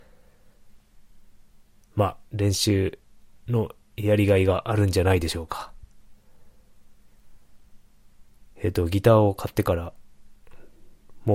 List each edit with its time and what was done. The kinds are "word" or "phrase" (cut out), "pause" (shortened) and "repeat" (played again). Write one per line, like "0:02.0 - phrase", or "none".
0:02.3 - pause
0:08.5 - pause

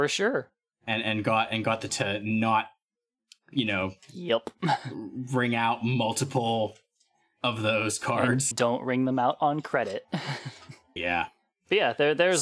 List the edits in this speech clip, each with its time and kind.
0:01.9 - word
0:08.5 - word
0:11.0 - word

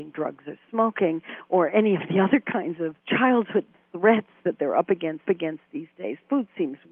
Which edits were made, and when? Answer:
0:03.0 - pause
0:05.3 - repeat

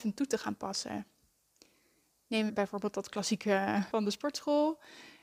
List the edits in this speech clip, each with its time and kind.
0:02.5 - word
0:03.9 - word

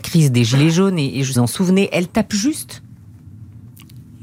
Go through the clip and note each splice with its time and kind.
0:01.4 - phrase

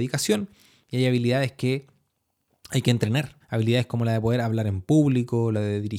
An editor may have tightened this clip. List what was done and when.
0:03.4 - pause

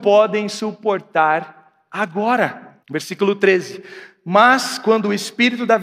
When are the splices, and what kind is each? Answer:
0:02.8 - pause

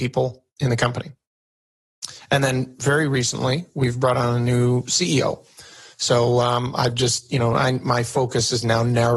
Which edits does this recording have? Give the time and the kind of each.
none

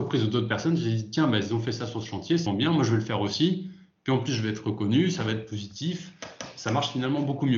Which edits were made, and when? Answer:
0:02.5 - word

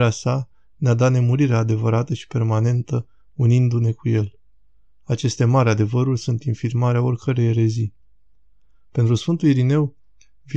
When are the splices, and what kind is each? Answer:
none

